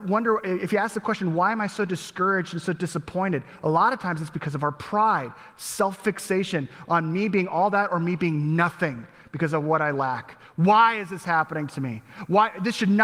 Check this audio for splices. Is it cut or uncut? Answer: uncut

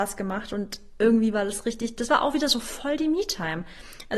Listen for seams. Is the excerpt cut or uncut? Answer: uncut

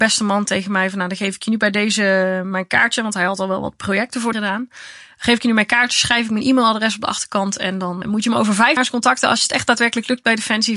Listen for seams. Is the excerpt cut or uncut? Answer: cut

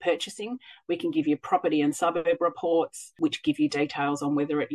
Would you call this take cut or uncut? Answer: uncut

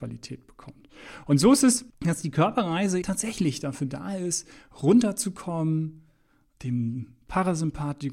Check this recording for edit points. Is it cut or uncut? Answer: cut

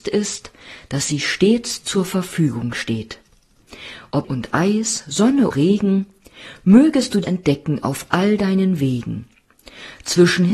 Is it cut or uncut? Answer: cut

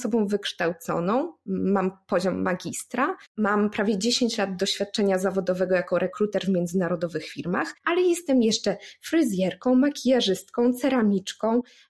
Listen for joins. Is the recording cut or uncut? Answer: cut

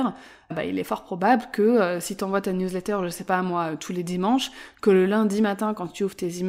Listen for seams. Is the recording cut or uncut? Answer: uncut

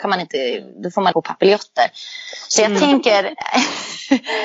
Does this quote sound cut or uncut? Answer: cut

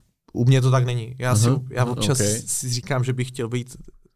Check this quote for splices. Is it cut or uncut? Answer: uncut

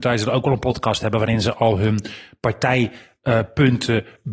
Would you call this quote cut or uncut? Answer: uncut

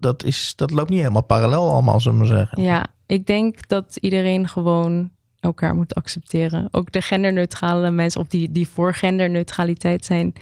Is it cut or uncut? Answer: uncut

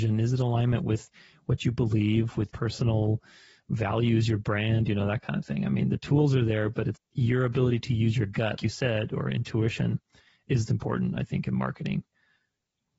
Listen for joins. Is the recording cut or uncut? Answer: cut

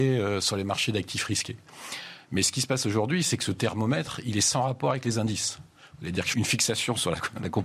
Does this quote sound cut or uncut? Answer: cut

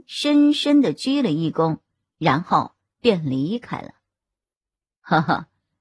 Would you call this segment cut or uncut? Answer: uncut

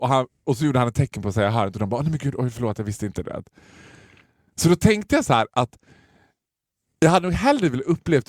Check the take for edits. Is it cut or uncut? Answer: uncut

